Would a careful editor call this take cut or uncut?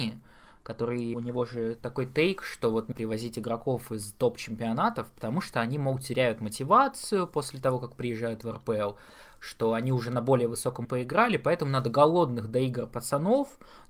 cut